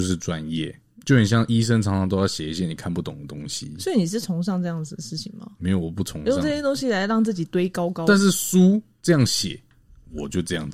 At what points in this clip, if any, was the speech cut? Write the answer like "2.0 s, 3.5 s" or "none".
none